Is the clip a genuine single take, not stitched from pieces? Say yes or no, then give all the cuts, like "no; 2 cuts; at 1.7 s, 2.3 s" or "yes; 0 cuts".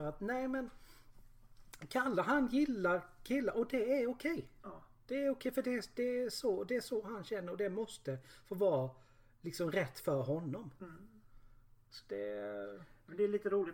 yes; 0 cuts